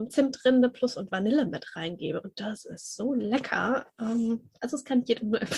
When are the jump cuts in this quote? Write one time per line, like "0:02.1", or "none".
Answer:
none